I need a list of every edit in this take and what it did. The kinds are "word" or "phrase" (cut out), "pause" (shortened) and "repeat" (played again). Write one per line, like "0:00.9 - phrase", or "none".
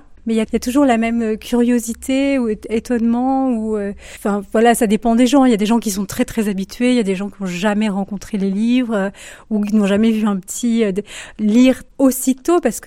none